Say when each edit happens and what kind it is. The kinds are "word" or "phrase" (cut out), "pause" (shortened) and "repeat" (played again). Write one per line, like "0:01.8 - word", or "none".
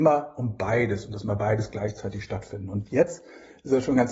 0:01.2 - word